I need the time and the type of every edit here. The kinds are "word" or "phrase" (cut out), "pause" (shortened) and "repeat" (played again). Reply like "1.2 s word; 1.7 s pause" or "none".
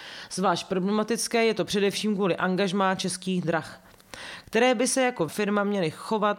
5.3 s word